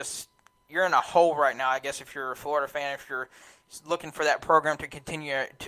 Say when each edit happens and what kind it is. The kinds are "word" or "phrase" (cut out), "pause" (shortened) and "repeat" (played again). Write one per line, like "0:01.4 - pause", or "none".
none